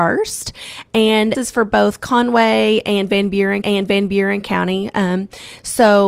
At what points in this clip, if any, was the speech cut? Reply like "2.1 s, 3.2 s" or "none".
1.3 s, 3.6 s